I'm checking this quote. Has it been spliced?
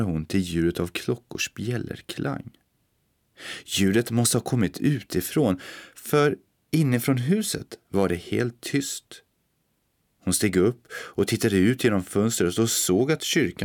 no; 0 cuts

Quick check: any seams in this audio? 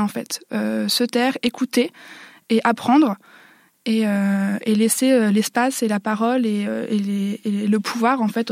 no; 0 cuts

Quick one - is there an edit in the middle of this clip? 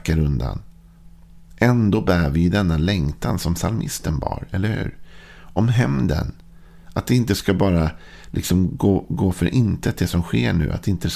yes; 1 cut; at 6.8 s

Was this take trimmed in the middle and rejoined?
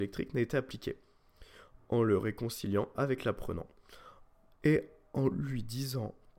no; 0 cuts

